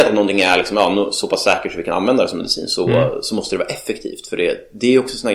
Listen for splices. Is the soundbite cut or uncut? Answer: uncut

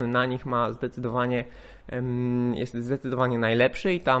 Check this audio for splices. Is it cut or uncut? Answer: uncut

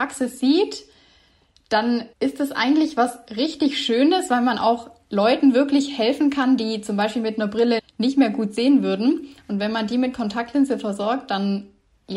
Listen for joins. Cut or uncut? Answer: cut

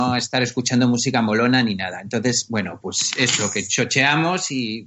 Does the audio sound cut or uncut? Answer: uncut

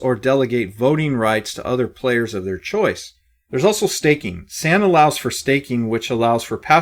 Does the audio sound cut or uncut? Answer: uncut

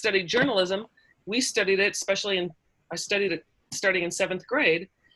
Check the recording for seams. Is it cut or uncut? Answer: uncut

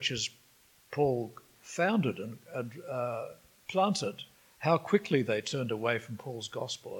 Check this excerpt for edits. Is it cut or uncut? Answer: cut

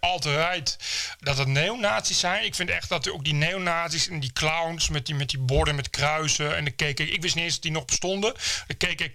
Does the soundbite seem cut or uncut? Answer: uncut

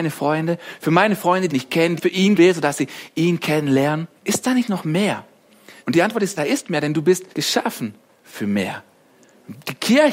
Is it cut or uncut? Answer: cut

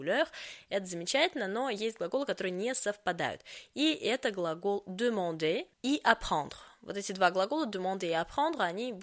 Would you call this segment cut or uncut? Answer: cut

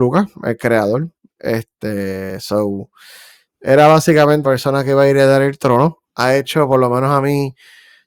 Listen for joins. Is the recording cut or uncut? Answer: cut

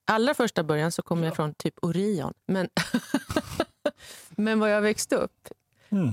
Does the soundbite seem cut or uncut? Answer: cut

